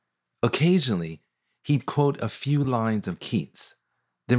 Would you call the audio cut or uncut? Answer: uncut